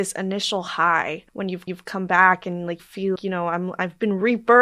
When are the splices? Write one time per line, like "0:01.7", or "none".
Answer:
0:01.3
0:01.7
0:02.8
0:03.2